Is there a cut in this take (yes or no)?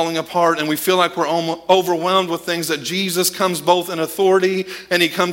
no